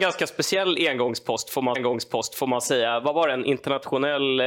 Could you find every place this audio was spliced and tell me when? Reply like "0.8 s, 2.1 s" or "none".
1.7 s